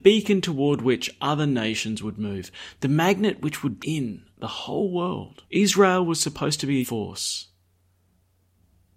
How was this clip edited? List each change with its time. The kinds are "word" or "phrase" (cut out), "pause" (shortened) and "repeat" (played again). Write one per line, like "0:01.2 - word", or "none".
0:03.8 - word
0:04.3 - pause
0:05.4 - pause
0:06.8 - word